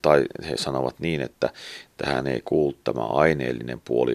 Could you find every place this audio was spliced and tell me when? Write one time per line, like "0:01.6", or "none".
none